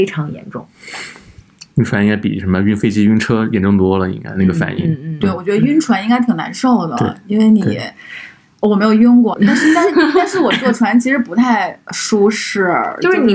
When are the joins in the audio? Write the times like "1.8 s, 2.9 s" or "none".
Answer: 9.3 s